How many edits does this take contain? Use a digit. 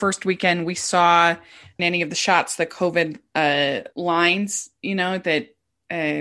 2